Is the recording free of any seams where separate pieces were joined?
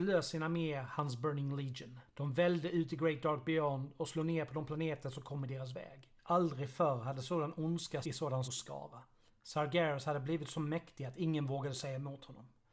no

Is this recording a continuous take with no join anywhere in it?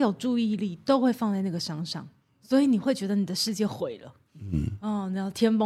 yes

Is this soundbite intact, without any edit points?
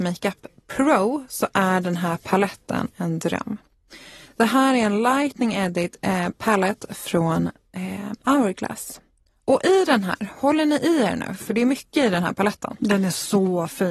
yes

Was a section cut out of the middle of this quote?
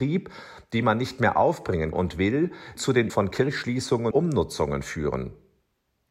yes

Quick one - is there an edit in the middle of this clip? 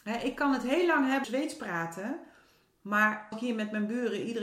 yes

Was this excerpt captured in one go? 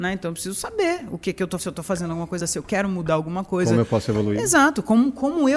no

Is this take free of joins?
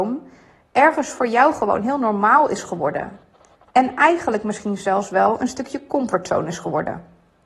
yes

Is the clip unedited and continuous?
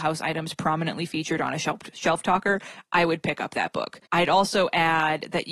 no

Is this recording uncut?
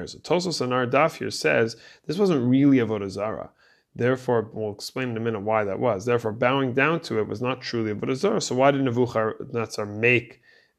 yes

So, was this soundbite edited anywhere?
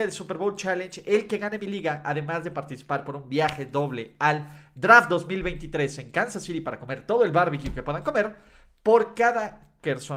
no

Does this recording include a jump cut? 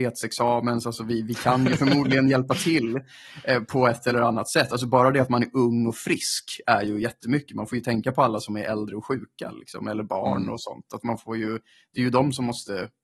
no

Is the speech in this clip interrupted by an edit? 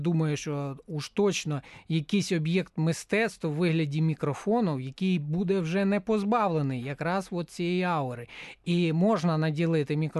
no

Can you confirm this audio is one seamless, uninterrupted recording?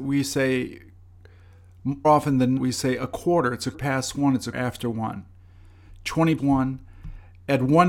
no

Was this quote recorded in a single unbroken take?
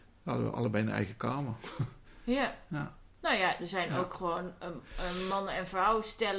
yes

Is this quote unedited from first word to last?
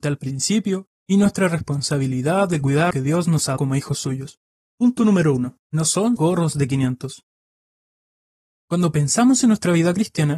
no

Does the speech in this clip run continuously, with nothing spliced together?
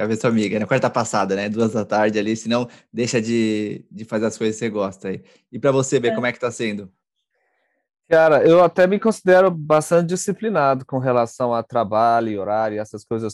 yes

